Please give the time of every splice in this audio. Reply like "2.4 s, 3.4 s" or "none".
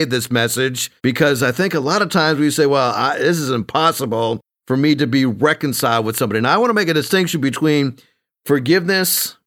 1.0 s